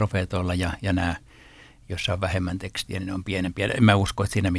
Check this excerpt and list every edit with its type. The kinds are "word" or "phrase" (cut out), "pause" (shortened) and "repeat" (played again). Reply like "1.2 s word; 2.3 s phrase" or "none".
none